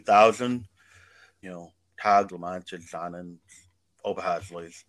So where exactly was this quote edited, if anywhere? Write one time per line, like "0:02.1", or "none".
0:01.4
0:02.3
0:02.9